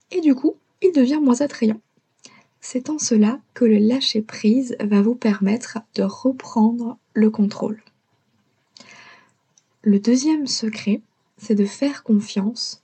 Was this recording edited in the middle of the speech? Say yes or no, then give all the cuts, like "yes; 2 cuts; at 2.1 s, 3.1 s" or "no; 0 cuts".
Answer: no; 0 cuts